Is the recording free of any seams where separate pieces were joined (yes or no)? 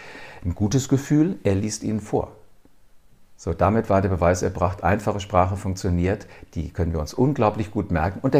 yes